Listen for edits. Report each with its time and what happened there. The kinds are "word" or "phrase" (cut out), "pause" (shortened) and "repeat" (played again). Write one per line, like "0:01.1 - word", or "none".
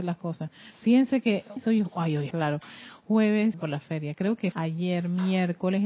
0:01.6 - word
0:02.3 - word
0:03.5 - word
0:04.5 - word